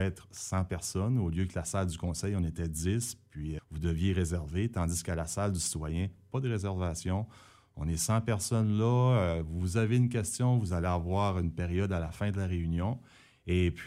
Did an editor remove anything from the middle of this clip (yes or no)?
yes